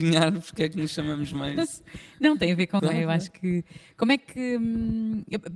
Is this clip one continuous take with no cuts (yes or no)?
no